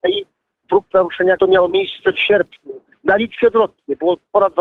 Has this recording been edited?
yes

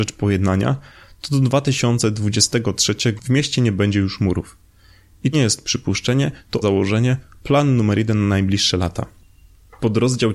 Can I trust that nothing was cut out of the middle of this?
no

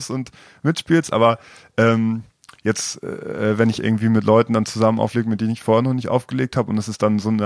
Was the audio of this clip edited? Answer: no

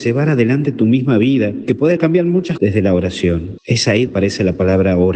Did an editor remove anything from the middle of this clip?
yes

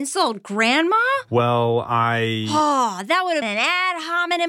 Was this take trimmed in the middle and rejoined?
yes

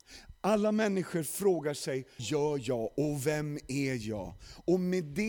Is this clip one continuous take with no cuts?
no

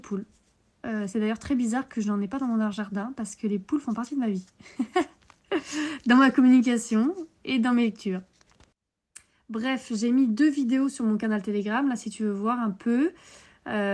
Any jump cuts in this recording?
no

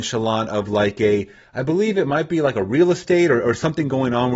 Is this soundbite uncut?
yes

